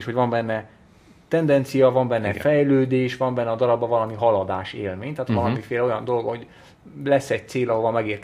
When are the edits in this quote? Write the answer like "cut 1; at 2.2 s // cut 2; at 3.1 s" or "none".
none